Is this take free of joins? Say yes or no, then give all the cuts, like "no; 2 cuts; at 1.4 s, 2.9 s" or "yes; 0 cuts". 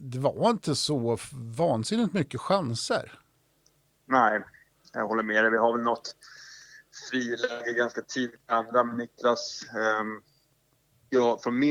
yes; 0 cuts